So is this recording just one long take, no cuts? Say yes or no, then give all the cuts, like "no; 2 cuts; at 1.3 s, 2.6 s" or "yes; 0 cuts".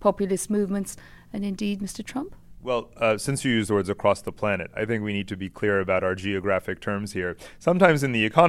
yes; 0 cuts